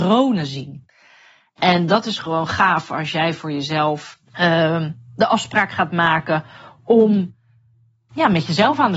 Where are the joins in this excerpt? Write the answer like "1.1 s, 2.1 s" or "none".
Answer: 4.3 s